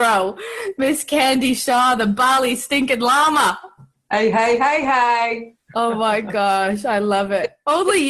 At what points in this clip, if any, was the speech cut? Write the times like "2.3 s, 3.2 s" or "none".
3.9 s